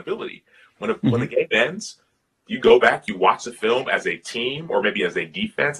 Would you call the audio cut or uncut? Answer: uncut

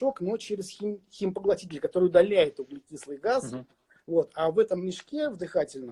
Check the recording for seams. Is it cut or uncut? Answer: uncut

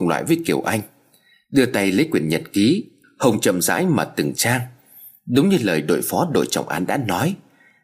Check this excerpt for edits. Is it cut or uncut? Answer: uncut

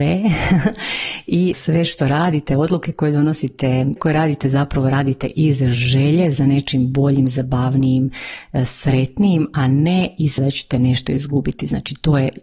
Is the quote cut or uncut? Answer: cut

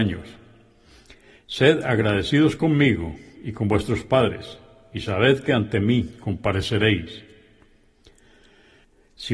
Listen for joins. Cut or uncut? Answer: uncut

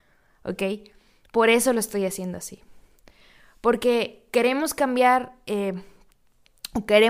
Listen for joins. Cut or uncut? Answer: uncut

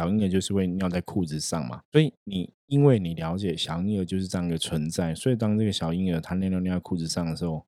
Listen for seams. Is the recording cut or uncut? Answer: cut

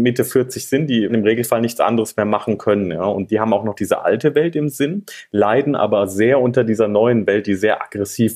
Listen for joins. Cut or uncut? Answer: cut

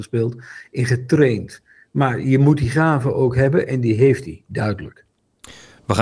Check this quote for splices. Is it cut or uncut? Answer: uncut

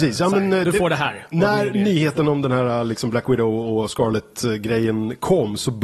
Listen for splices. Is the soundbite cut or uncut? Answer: uncut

